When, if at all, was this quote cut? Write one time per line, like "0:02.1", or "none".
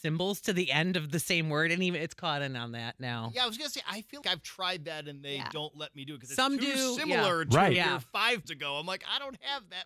0:04.2
0:08.4